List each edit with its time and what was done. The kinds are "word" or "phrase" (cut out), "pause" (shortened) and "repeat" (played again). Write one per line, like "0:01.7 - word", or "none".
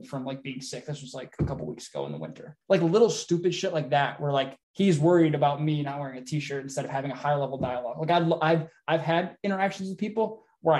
0:02.6 - pause
0:04.6 - pause